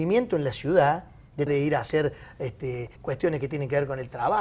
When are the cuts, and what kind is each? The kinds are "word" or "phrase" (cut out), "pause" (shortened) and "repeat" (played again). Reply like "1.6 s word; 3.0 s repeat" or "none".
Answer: 1.5 s word; 3.0 s word